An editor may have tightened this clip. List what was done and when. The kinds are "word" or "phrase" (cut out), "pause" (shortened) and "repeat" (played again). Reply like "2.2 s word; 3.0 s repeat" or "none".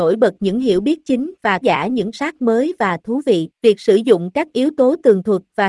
1.6 s phrase; 2.1 s word; 3.6 s pause